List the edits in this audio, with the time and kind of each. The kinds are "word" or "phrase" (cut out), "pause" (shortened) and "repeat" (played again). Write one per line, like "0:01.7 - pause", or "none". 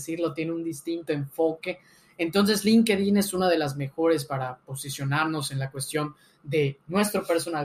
none